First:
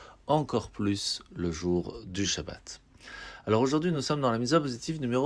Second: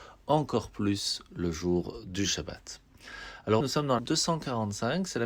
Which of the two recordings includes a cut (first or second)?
second